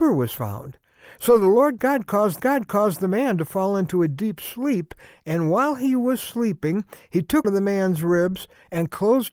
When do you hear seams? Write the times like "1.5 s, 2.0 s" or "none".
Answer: 2.4 s, 7.4 s